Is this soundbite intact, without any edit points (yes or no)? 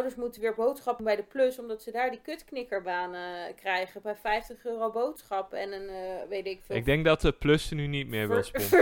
no